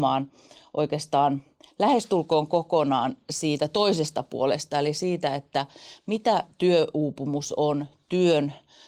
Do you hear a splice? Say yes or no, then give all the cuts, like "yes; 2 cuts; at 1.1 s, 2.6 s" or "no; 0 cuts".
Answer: no; 0 cuts